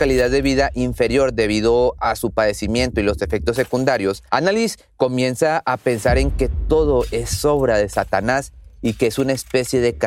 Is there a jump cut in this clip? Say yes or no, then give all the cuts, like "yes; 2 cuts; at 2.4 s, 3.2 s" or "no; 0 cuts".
yes; 1 cut; at 4.3 s